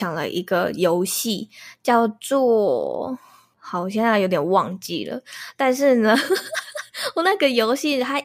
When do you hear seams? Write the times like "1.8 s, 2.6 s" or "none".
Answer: none